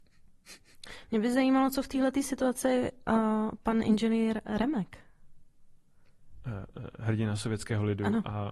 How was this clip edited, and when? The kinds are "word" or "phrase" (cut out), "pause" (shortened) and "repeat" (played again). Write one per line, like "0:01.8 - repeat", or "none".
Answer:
none